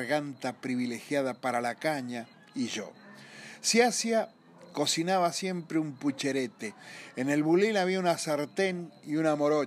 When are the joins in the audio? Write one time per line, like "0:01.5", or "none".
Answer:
0:02.3